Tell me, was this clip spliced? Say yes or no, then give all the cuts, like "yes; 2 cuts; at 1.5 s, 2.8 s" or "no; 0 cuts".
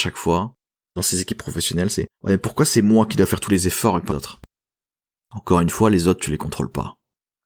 yes; 3 cuts; at 1.0 s, 2.1 s, 4.1 s